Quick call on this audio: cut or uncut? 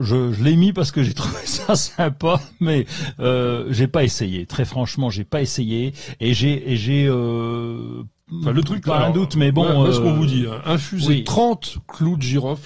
uncut